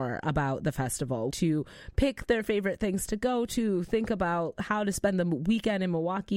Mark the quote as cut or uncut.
cut